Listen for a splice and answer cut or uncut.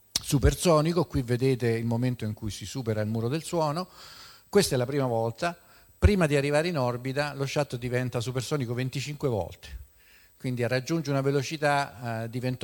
uncut